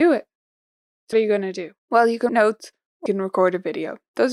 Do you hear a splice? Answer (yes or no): yes